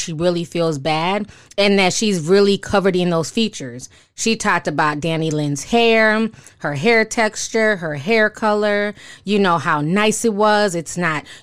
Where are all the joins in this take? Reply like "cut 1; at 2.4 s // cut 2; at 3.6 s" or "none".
none